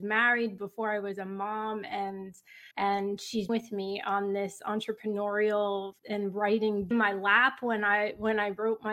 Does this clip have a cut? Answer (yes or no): yes